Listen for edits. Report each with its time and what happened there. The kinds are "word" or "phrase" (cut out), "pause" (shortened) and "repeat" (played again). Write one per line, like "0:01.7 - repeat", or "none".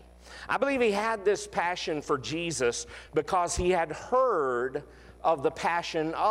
none